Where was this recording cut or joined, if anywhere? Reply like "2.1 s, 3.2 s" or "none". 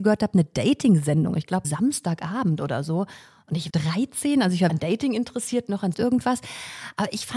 1.6 s, 3.7 s, 4.7 s, 5.9 s